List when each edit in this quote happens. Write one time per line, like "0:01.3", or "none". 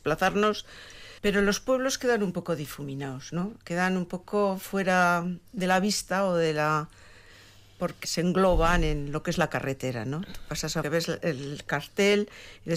0:01.2
0:05.5
0:08.0
0:10.8

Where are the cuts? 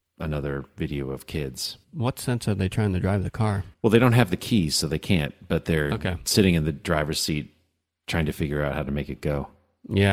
0:01.8
0:03.7

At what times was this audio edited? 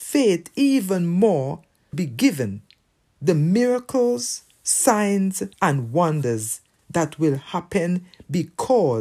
0:01.9
0:03.0
0:05.5

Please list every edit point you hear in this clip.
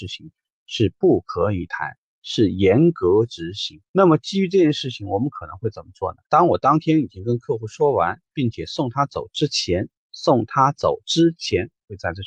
0:03.9
0:06.2

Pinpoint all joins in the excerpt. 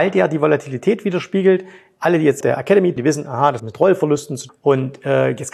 0:02.4
0:03.0
0:03.6
0:04.5

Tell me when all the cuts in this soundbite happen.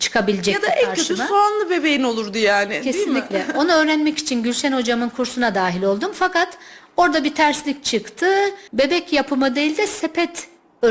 0:08.7

